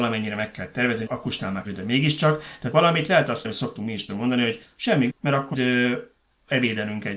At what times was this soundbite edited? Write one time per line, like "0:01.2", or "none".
0:01.1
0:01.6
0:02.7
0:03.4
0:04.1
0:05.1
0:05.5